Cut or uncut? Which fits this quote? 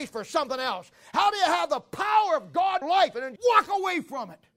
cut